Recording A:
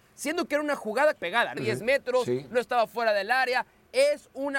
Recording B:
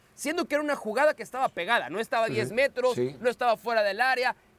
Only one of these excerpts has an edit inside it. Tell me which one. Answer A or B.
A